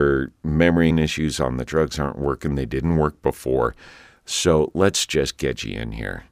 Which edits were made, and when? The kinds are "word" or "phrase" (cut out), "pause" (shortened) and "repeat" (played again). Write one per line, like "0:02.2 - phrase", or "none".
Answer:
0:00.9 - phrase
0:01.7 - word